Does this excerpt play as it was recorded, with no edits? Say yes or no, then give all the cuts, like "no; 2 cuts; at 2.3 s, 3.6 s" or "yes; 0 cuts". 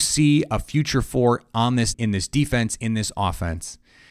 no; 1 cut; at 1.9 s